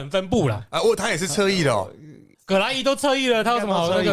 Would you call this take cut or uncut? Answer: uncut